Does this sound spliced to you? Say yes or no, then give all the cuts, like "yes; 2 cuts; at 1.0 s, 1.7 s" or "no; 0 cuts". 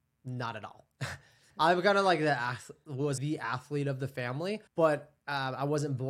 yes; 3 cuts; at 1.5 s, 3.2 s, 4.7 s